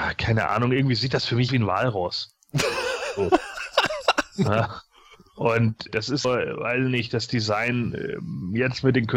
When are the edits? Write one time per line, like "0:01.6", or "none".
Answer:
0:01.5
0:05.9
0:06.2